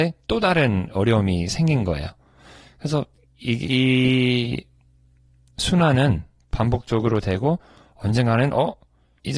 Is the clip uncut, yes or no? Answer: yes